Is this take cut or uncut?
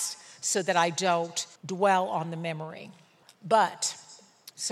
cut